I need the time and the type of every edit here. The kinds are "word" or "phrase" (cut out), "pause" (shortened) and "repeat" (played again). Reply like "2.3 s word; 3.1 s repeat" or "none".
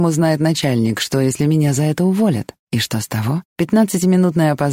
2.6 s pause; 3.5 s pause